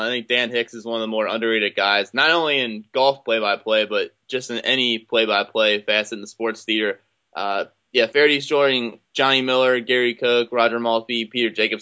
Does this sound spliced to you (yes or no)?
no